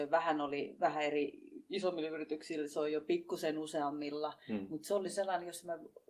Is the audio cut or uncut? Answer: uncut